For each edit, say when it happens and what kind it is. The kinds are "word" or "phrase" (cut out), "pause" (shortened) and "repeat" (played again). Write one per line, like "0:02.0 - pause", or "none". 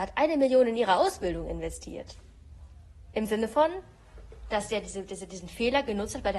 none

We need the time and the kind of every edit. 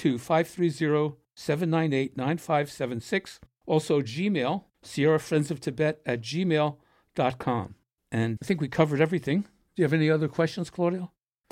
0:04.7 - pause
0:08.4 - word

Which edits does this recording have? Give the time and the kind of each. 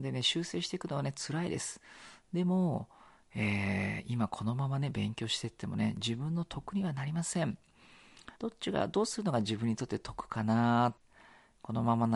0:08.3 - pause

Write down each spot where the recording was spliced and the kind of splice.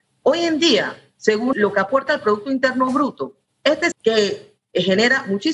0:01.5 - word
0:03.9 - word

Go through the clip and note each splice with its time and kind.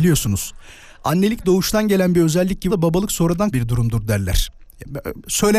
0:02.7 - word
0:03.5 - word

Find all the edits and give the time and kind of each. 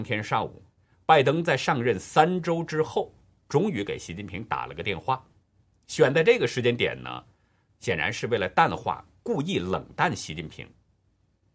none

